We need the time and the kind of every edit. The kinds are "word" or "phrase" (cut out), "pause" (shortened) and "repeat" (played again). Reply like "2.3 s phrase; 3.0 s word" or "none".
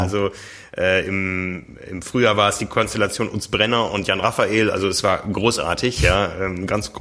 none